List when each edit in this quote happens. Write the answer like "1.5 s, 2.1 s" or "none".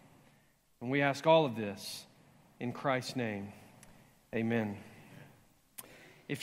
none